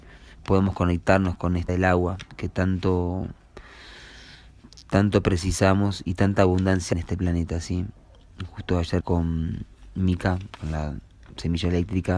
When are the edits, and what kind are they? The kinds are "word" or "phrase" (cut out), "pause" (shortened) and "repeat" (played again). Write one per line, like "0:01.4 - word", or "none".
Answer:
0:01.7 - word
0:06.9 - word
0:09.0 - word